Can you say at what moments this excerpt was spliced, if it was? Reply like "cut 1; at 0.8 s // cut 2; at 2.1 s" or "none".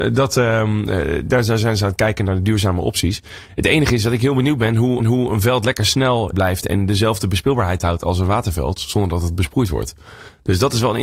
cut 1; at 5.0 s // cut 2; at 6.3 s